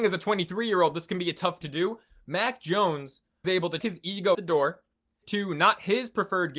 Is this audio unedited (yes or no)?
no